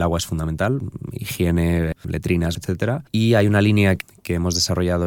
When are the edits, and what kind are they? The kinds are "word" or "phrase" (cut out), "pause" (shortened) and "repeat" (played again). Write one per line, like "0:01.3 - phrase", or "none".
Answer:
0:02.5 - word
0:03.1 - pause

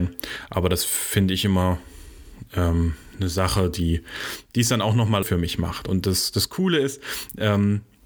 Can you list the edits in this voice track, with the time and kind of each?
0:05.2 - word

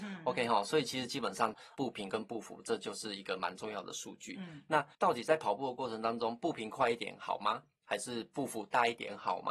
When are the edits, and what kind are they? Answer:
0:04.9 - pause

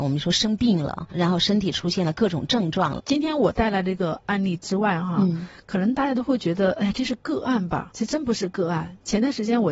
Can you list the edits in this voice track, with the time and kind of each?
0:01.1 - phrase

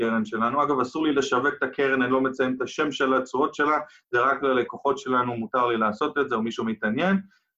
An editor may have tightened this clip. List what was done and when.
none

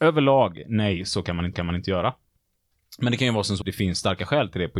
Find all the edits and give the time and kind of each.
0:01.5 - repeat
0:03.6 - word

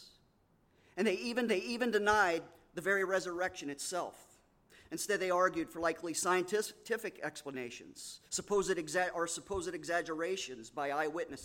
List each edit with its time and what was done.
0:01.5 - repeat
0:08.3 - pause

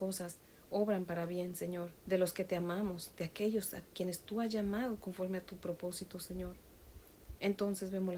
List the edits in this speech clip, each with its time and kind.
0:02.0 - pause

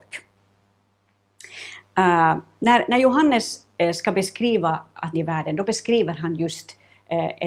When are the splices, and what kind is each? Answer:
0:05.1 - phrase

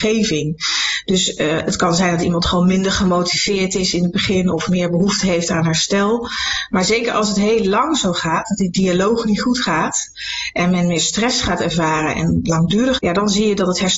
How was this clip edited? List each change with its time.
0:13.0 - word

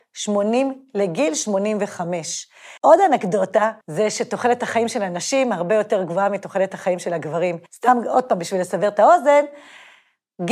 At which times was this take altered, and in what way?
0:02.8 - pause
0:03.8 - pause
0:07.7 - pause

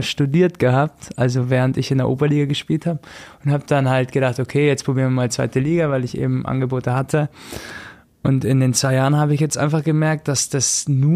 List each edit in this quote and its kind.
none

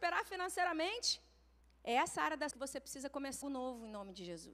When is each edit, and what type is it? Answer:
0:01.6 - pause
0:02.5 - phrase
0:03.4 - word

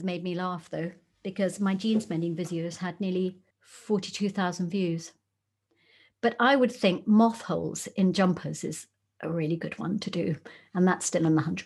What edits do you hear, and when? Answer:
0:03.5 - pause

